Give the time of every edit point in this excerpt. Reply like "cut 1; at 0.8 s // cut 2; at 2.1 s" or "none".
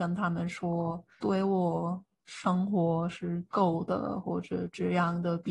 cut 1; at 1.2 s